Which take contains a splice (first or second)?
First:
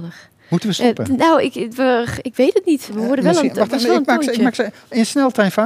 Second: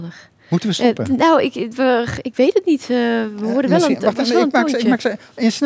first